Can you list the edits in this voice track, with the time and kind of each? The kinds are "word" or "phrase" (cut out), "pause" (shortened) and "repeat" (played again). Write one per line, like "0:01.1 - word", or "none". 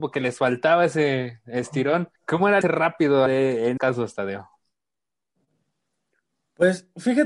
0:02.2 - pause
0:02.6 - word
0:03.3 - word
0:03.8 - word